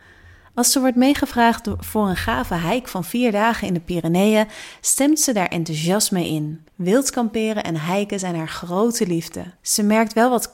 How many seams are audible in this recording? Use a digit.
2